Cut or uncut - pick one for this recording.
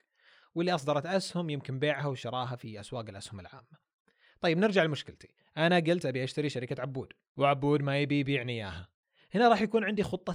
uncut